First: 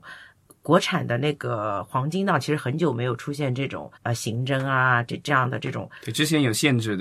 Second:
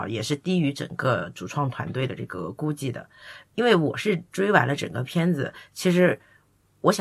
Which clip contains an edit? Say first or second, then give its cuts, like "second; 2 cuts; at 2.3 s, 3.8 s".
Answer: first; 1 cut; at 4.0 s